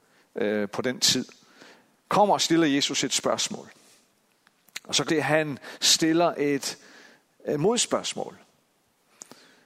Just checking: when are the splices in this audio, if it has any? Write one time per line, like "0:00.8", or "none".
0:05.1